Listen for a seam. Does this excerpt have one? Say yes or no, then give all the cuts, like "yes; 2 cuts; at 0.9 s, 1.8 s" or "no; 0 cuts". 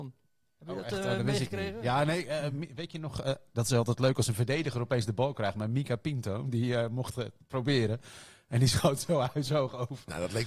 no; 0 cuts